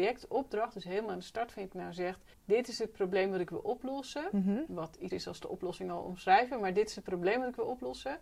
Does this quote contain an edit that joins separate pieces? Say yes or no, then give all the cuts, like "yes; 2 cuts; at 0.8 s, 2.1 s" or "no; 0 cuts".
yes; 3 cuts; at 1.7 s, 2.3 s, 5.1 s